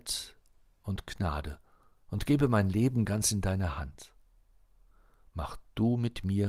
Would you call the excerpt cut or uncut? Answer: uncut